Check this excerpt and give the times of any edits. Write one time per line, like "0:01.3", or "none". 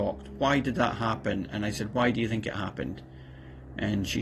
none